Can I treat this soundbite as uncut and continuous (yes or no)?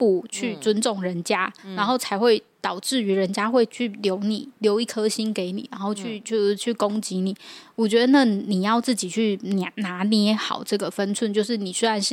no